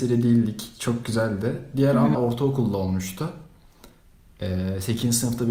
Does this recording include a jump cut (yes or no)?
yes